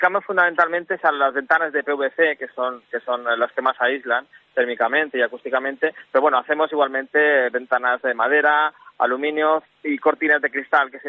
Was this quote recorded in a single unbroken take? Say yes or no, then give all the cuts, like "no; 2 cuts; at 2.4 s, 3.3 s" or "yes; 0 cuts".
yes; 0 cuts